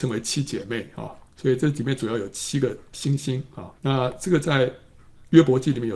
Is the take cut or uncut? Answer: cut